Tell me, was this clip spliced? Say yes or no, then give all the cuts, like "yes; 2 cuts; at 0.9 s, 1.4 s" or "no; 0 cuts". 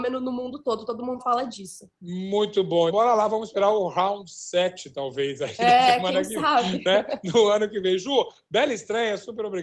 yes; 2 cuts; at 1.2 s, 2.9 s